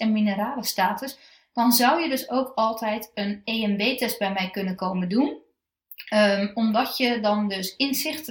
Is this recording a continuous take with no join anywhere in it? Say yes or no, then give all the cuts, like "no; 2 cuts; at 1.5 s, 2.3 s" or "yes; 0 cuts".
yes; 0 cuts